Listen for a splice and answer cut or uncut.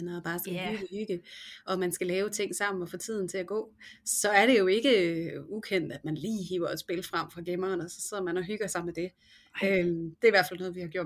uncut